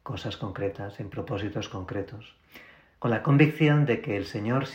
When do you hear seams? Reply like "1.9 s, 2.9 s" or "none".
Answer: none